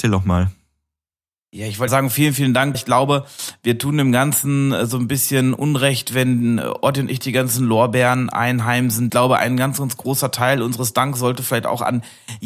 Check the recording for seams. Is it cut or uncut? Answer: cut